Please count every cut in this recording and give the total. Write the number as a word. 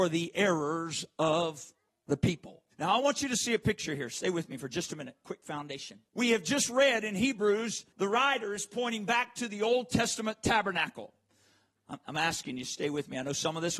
four